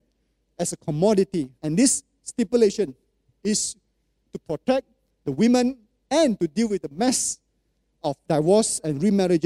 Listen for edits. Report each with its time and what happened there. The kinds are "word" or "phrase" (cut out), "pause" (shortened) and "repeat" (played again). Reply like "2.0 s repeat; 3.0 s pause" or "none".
1.6 s pause

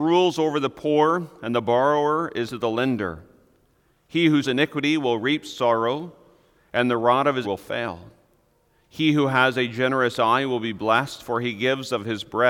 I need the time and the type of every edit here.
2.5 s word; 4.4 s word; 7.4 s word

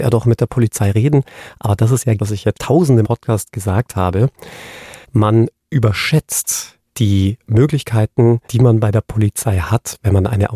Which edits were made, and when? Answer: 2.2 s phrase; 2.5 s word; 3.0 s phrase; 5.0 s pause; 6.9 s pause; 8.4 s pause

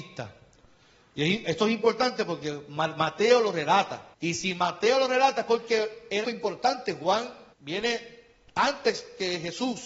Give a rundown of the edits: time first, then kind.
4.1 s pause; 6.2 s phrase; 7.5 s pause

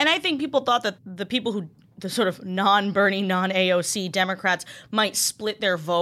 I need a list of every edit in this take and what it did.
1.0 s word

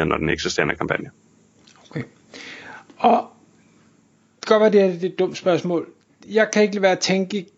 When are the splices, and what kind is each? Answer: none

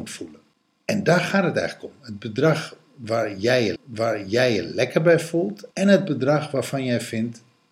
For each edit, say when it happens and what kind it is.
3.8 s repeat; 5.7 s pause

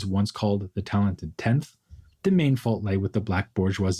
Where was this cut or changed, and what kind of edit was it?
none

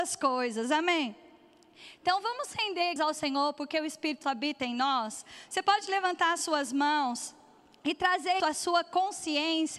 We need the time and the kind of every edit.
3.0 s word; 4.2 s word; 8.4 s word

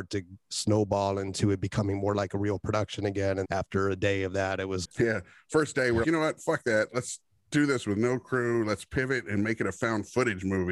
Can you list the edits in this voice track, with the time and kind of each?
3.4 s word; 4.8 s word; 6.0 s word

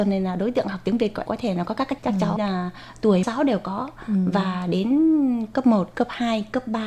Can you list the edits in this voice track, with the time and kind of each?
1.3 s word; 2.0 s word; 2.4 s word; 3.2 s word; 5.5 s word

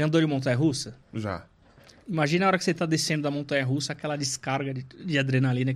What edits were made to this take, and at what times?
1.0 s pause

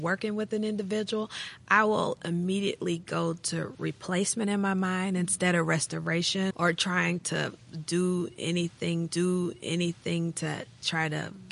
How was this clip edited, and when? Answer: 6.5 s word; 9.1 s repeat

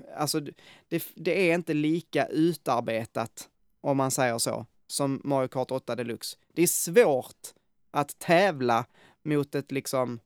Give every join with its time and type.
none

